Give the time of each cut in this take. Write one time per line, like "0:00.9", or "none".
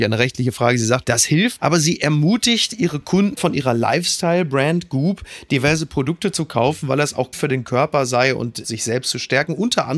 0:01.0
0:01.6
0:03.3
0:07.3
0:08.6